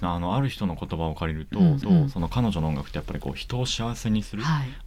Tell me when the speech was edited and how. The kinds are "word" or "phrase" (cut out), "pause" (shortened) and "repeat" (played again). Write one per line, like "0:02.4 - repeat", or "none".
0:01.8 - repeat